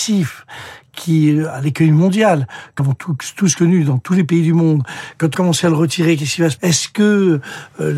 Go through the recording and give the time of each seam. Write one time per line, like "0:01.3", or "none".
0:02.8
0:05.3
0:06.6